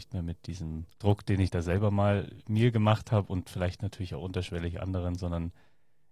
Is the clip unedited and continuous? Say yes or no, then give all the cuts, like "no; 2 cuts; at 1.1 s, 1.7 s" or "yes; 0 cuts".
no; 1 cut; at 0.9 s